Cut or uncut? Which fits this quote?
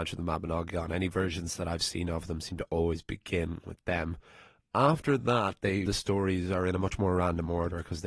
cut